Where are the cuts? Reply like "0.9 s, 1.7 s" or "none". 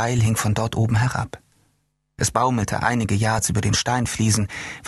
none